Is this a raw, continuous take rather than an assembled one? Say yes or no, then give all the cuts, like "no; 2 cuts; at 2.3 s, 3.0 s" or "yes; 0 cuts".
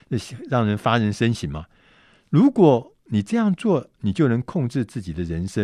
yes; 0 cuts